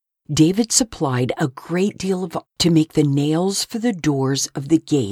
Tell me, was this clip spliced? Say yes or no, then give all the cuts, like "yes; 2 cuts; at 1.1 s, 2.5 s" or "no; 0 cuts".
yes; 1 cut; at 2.4 s